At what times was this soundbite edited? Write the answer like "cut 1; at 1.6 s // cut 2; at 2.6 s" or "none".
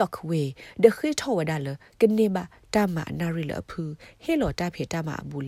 none